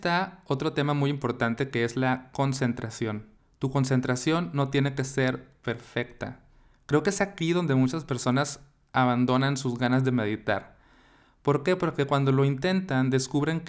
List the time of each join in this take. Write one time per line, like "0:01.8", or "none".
0:03.4